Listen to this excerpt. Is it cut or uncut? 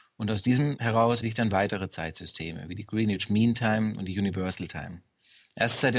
cut